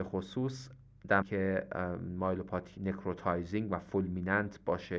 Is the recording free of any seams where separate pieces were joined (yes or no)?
no